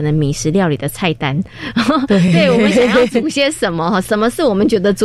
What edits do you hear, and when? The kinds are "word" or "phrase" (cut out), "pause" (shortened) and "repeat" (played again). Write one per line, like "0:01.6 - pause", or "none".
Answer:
none